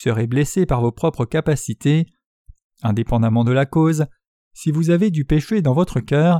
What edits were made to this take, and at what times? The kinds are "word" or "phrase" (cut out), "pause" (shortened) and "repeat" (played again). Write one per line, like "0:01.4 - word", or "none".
none